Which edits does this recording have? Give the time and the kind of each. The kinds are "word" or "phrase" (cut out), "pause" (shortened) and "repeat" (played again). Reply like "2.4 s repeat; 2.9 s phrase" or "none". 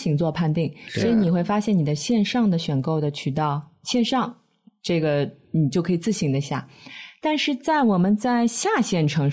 none

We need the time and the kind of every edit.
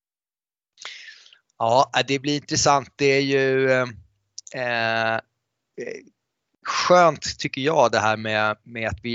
none

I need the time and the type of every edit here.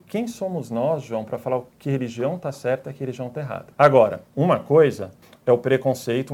1.7 s pause; 3.7 s pause; 5.2 s pause

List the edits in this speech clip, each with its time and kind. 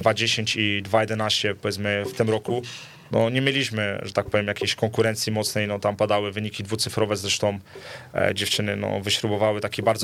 none

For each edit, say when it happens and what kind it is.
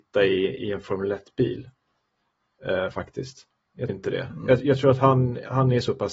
3.9 s word

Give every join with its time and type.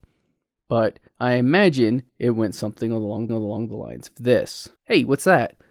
1.1 s pause; 3.3 s repeat; 4.8 s pause

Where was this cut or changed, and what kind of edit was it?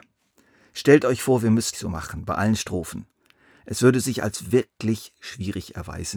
1.7 s phrase

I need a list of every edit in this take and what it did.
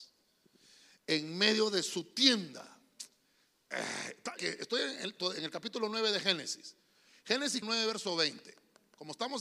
4.4 s word; 7.6 s word

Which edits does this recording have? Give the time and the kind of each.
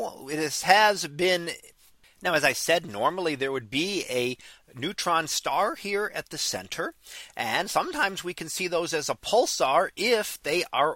none

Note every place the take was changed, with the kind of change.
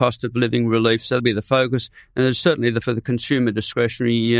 1.2 s word; 2.8 s word

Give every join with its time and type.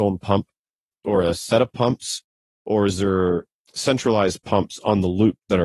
none

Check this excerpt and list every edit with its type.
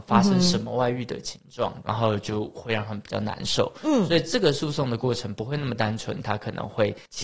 1.8 s phrase

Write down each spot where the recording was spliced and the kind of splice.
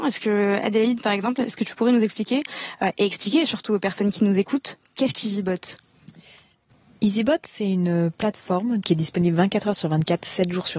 none

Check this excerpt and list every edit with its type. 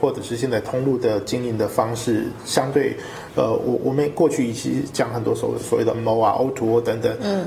5.9 s word

